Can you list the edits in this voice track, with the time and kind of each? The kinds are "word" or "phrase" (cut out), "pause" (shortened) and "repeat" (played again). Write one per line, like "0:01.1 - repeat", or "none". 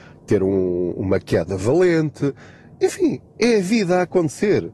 0:03.3 - pause